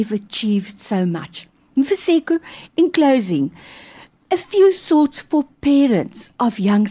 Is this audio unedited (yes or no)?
yes